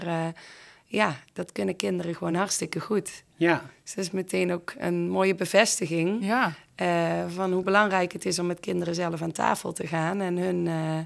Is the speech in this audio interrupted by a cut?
no; 0 cuts

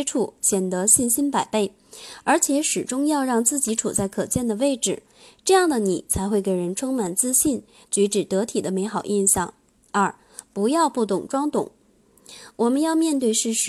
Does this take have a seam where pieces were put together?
no; 0 cuts

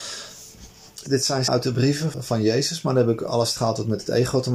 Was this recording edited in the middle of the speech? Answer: yes; 4 cuts; at 1.1 s, 1.5 s, 2.1 s, 3.6 s

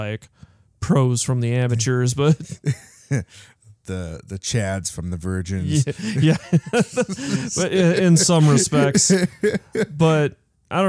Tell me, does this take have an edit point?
no; 0 cuts

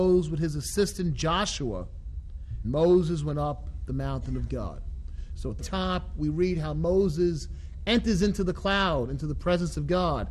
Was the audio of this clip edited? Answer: yes; 2 cuts; at 2.6 s, 5.6 s

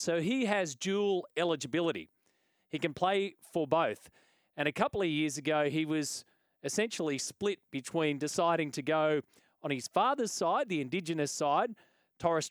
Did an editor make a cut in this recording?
no; 0 cuts

